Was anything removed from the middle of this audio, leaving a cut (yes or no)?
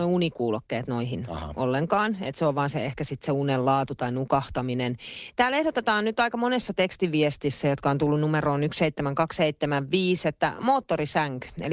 no